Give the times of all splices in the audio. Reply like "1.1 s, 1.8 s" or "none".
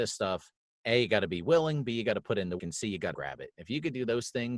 2.6 s, 3.1 s